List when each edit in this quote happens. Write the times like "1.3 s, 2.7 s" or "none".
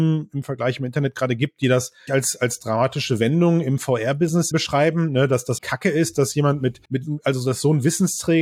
2.1 s, 4.5 s, 5.6 s, 6.9 s